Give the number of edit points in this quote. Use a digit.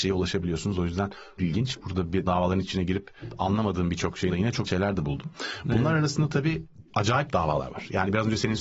5